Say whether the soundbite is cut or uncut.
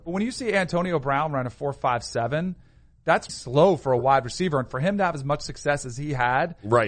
cut